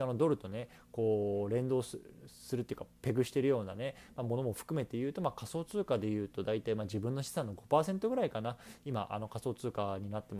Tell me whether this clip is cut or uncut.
uncut